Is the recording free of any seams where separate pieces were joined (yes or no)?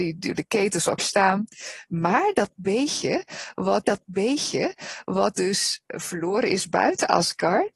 no